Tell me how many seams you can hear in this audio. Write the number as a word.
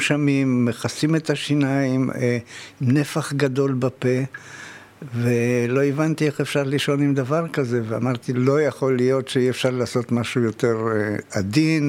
zero